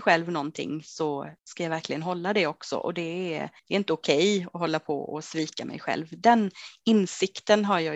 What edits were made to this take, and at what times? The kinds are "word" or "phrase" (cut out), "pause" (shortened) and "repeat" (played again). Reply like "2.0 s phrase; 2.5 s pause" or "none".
1.4 s pause; 3.6 s pause